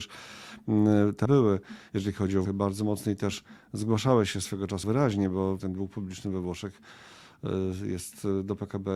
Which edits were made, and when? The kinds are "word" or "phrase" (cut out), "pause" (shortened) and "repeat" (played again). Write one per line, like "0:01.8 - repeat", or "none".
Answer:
0:01.3 - word
0:02.5 - word
0:04.8 - word
0:05.6 - word